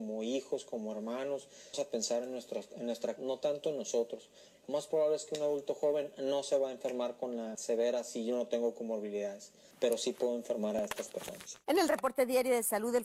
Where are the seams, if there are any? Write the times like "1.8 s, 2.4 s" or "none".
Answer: 1.7 s, 3.2 s, 7.5 s, 9.7 s